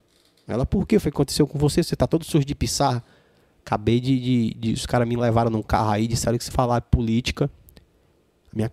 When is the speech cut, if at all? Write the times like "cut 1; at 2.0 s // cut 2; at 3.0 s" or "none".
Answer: cut 1; at 6.5 s